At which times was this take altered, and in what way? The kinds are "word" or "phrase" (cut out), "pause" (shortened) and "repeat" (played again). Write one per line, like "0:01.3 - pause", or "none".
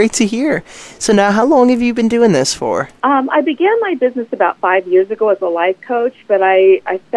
0:03.0 - pause